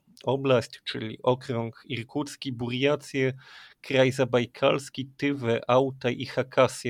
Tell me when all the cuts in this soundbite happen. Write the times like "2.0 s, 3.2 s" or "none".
none